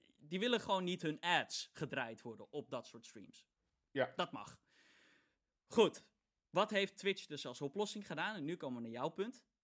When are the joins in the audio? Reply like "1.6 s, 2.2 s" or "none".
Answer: none